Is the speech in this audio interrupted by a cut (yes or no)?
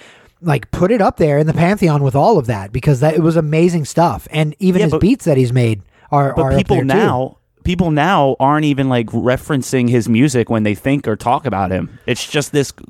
no